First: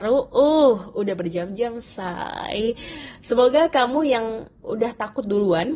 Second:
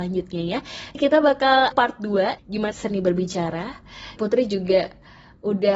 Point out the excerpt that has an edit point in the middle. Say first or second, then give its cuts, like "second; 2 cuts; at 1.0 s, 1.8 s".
second; 5 cuts; at 0.9 s, 1.7 s, 2.4 s, 2.7 s, 4.2 s